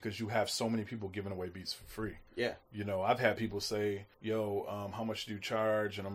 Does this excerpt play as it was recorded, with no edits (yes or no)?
no